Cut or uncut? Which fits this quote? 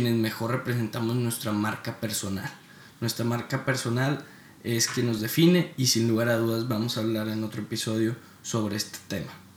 uncut